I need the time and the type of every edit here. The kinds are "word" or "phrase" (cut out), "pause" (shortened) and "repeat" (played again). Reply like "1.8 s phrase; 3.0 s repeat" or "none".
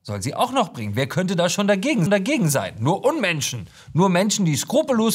2.1 s repeat